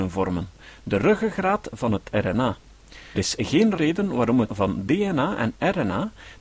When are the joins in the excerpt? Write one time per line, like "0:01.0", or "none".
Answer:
0:03.1
0:03.8
0:04.5